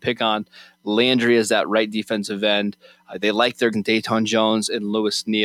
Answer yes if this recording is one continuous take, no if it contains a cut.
no